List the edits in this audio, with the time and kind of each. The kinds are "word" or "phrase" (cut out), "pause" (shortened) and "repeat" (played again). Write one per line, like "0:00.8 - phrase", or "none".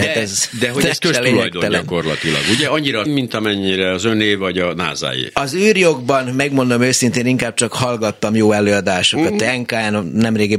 0:03.1 - word